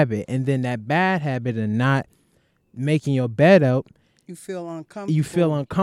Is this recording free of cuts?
yes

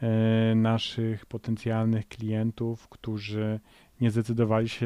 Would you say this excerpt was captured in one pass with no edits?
yes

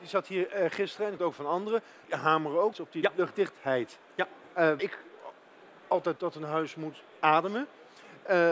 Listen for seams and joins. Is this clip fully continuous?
no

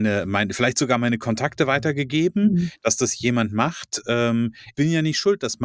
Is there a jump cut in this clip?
yes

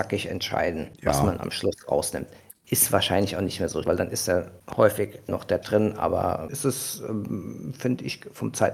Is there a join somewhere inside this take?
yes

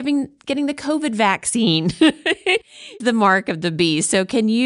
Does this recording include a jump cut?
yes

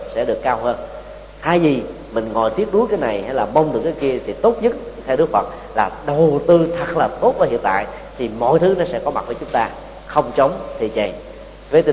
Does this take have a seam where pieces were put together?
no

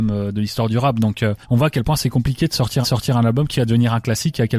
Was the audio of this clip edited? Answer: yes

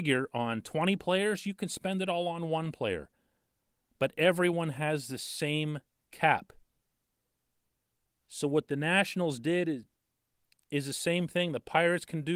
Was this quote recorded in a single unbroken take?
yes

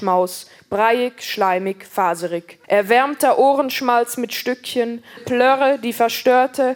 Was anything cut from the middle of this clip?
yes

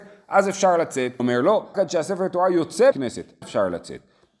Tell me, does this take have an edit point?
yes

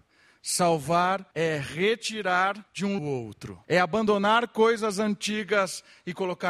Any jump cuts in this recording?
yes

